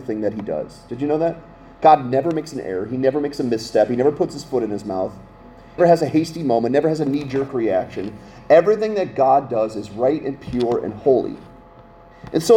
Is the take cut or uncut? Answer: cut